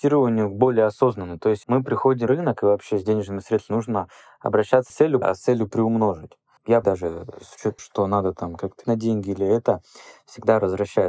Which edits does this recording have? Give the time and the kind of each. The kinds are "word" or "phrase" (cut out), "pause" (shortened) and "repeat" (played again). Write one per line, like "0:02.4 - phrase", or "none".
0:01.6 - word
0:02.3 - word
0:04.9 - word
0:05.2 - word
0:06.8 - word
0:07.8 - word
0:08.8 - word

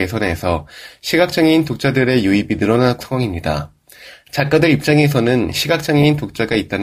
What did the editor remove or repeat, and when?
0:03.0 - word

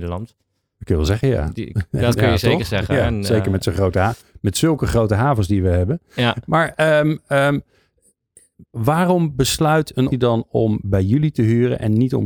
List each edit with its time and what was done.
0:08.7 - pause
0:10.1 - word

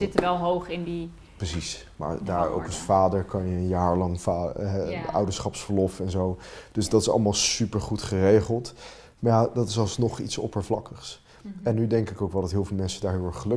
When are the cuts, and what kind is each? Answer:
none

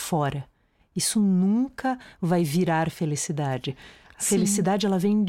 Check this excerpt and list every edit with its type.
none

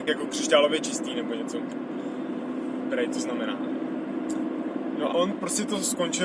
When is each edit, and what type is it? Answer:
0:05.1 - word

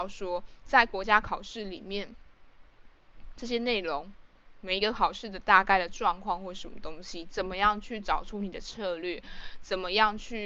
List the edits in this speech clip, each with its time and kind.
none

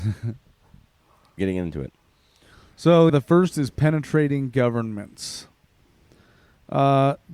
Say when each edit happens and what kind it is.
0:01.4 - word
0:03.1 - word

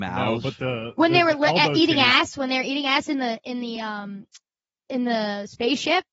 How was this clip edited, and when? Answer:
none

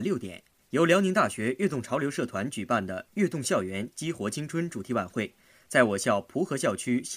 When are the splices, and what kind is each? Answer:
none

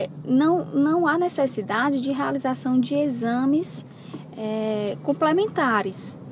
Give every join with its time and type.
none

